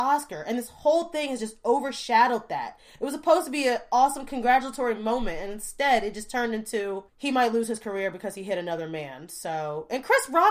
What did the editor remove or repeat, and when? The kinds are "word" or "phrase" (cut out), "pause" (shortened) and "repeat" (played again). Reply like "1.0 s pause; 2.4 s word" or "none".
7.1 s pause